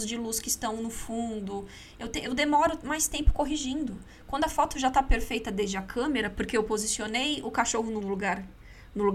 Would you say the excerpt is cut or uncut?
cut